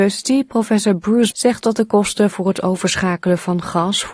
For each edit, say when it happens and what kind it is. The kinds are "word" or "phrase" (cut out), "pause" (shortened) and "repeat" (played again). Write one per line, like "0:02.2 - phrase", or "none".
0:01.3 - word